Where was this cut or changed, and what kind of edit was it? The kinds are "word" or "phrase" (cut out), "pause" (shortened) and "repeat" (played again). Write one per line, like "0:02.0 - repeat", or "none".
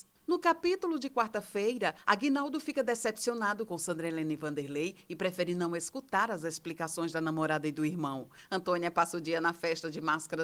none